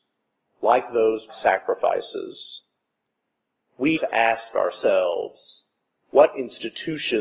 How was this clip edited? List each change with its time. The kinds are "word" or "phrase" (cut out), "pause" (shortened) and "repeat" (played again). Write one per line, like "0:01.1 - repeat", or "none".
0:01.3 - word
0:04.0 - word